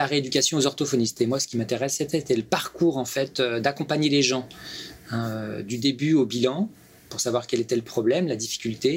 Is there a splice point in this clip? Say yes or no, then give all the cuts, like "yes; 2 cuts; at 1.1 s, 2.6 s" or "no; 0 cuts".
no; 0 cuts